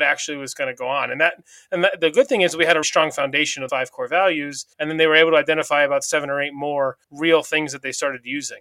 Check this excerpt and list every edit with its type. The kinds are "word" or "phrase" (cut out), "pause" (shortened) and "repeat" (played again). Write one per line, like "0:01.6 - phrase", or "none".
0:02.8 - word
0:03.7 - word
0:04.7 - pause
0:07.0 - pause